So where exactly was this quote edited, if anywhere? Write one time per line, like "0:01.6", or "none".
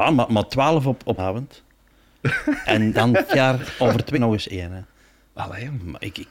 0:01.2
0:02.9
0:03.3
0:04.1